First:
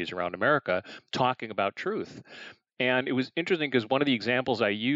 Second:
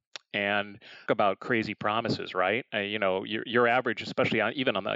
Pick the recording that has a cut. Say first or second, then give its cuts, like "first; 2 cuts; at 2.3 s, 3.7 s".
second; 1 cut; at 1.1 s